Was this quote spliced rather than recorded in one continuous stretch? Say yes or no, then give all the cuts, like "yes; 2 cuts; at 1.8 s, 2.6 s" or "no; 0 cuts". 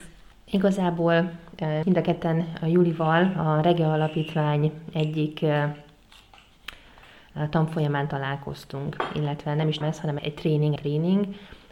yes; 4 cuts; at 1.8 s, 9.8 s, 10.2 s, 10.8 s